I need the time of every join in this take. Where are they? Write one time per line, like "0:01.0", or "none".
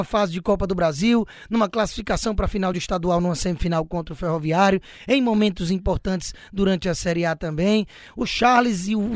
none